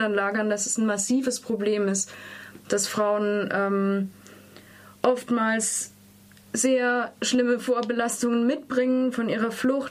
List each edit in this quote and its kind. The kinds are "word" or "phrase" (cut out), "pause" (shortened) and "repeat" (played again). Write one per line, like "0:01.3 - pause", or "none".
none